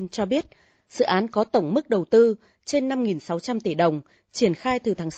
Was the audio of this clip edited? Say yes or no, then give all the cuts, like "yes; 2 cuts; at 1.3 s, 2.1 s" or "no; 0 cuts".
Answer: no; 0 cuts